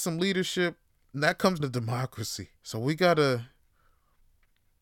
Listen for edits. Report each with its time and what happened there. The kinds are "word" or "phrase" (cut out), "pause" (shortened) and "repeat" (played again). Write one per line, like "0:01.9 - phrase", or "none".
0:00.9 - pause
0:01.6 - word
0:02.6 - pause